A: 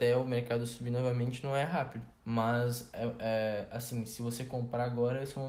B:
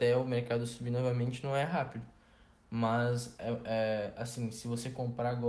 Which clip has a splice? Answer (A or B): A